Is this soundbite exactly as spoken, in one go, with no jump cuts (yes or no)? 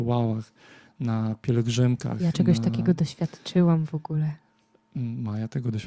yes